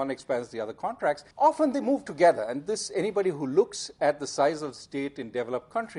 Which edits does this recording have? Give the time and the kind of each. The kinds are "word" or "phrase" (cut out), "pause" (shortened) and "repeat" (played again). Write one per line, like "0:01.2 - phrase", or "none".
0:01.3 - pause